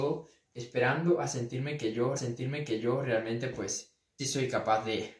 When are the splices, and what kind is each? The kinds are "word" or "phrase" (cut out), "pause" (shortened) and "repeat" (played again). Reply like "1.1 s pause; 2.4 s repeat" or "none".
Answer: 2.2 s repeat; 4.2 s word